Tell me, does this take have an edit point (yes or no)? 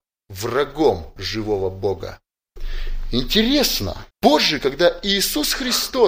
yes